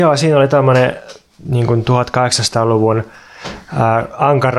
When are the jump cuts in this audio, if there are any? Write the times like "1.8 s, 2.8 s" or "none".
none